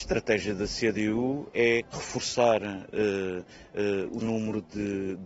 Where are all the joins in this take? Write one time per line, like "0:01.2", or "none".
0:01.9
0:04.2